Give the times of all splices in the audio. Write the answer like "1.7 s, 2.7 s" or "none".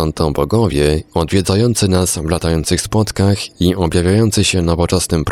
none